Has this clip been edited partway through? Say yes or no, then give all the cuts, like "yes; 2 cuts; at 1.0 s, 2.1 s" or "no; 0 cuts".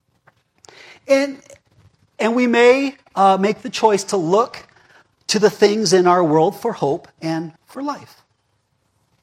yes; 1 cut; at 7.6 s